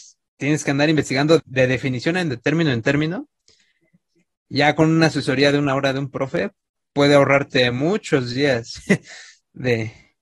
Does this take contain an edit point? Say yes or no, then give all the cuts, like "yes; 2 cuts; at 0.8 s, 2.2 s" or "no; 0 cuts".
yes; 2 cuts; at 1.4 s, 2.3 s